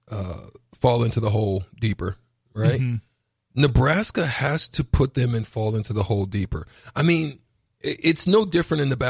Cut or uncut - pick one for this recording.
uncut